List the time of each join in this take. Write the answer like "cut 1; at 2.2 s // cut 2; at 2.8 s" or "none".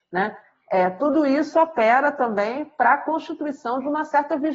none